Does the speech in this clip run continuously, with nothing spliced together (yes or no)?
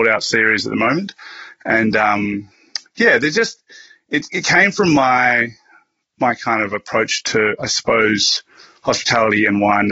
yes